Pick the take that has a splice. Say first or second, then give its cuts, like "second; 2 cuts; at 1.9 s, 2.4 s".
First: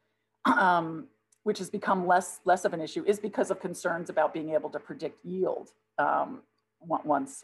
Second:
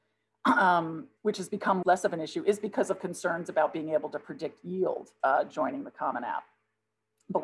second; 3 cuts; at 1.2 s, 1.8 s, 5.2 s